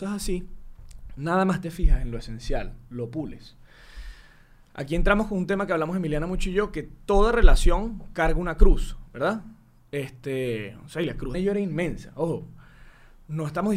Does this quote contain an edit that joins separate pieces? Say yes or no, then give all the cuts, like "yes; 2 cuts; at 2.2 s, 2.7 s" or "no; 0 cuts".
yes; 1 cut; at 11.3 s